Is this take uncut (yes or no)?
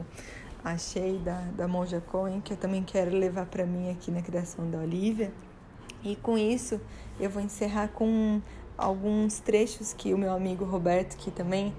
yes